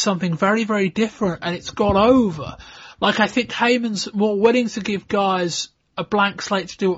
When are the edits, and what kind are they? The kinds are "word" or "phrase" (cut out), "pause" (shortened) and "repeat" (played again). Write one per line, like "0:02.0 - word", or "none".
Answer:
none